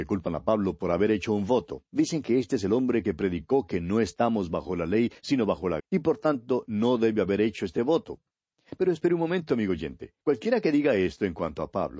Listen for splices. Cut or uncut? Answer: cut